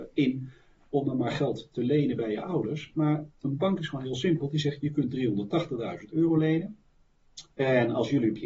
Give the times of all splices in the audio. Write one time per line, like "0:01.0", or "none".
none